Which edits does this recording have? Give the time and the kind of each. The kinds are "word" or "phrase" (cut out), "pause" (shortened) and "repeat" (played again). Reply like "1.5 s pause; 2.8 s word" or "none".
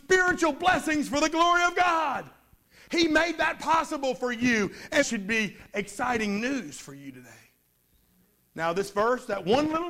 5.0 s word